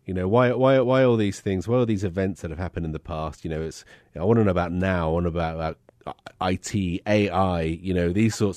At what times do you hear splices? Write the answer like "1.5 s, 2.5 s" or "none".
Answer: none